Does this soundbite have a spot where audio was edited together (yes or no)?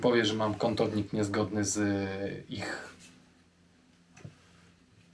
no